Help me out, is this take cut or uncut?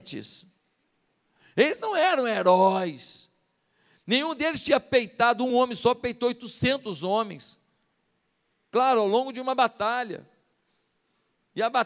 uncut